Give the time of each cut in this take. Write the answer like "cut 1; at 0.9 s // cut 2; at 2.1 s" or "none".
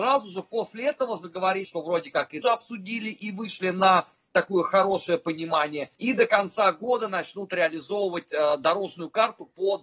cut 1; at 1.6 s // cut 2; at 2.4 s // cut 3; at 6.0 s